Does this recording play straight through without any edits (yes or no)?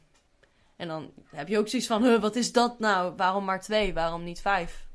yes